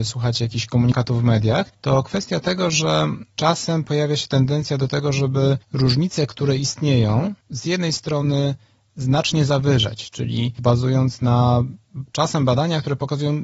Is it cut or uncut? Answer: cut